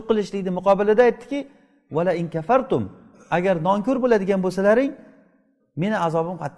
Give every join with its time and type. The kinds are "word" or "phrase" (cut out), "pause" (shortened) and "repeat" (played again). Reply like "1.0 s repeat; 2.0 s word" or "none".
none